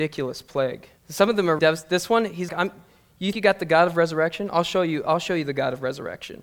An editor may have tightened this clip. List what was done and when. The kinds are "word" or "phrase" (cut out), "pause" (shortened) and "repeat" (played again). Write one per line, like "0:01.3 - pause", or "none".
0:01.0 - pause
0:01.6 - word
0:02.5 - word
0:03.3 - word